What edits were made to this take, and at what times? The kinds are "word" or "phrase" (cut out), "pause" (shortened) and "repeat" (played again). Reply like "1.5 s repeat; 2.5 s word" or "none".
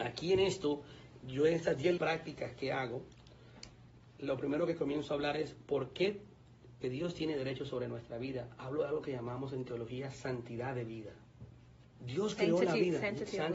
2.0 s word; 6.8 s word